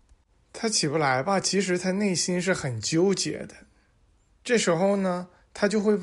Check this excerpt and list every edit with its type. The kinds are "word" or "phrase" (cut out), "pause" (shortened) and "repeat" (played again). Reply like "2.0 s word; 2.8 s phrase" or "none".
none

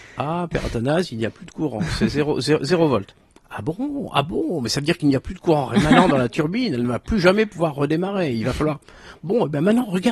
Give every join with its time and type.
none

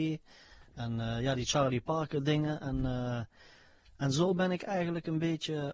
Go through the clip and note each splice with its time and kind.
none

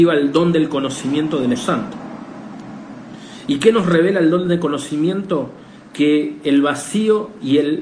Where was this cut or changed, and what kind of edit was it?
1.6 s word

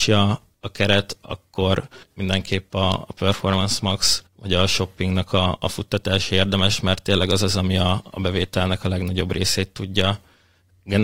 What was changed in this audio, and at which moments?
2.0 s pause; 4.3 s pause

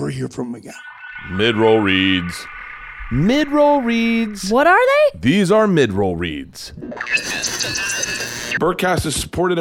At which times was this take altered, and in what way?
none

